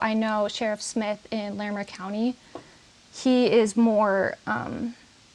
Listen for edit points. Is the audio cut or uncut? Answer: uncut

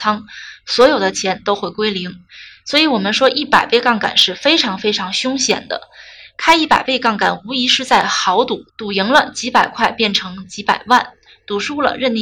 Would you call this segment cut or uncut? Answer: cut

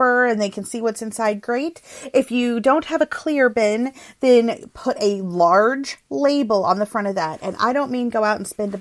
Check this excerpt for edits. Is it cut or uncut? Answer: uncut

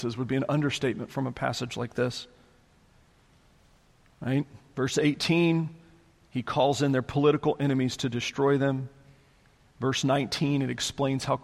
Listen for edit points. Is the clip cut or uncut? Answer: uncut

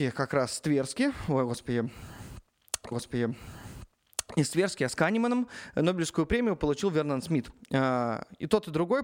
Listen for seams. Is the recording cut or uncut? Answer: cut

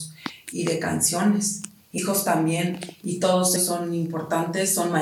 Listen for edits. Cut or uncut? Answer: cut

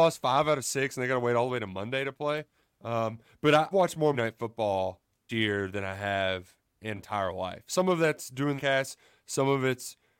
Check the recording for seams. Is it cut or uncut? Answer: cut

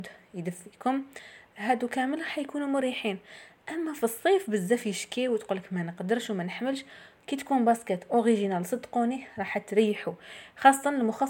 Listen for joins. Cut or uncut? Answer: uncut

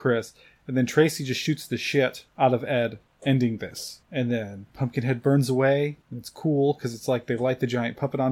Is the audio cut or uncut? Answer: uncut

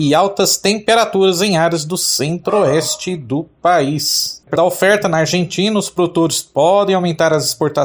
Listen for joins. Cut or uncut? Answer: cut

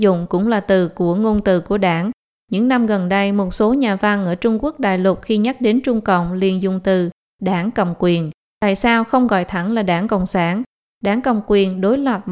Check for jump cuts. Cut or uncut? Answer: uncut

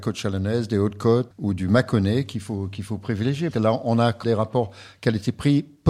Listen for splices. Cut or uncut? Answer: cut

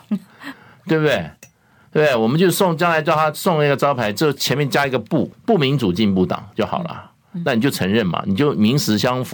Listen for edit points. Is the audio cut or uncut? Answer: cut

